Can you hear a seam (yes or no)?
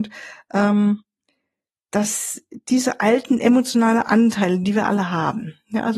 no